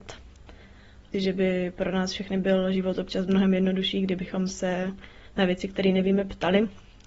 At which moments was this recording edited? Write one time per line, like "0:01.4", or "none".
0:01.1